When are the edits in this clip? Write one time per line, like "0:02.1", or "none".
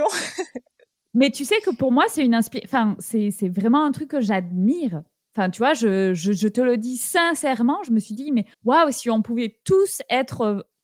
0:08.5